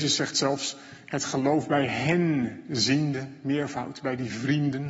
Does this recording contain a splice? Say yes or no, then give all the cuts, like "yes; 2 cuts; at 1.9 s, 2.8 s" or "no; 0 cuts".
no; 0 cuts